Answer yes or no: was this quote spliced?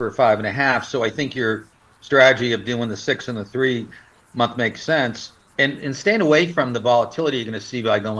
no